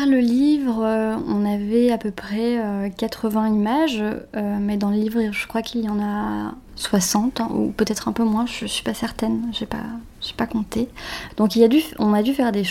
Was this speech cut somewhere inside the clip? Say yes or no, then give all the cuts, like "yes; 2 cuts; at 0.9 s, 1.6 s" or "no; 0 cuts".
yes; 1 cut; at 6.7 s